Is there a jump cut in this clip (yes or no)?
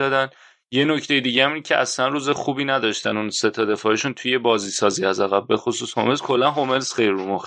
no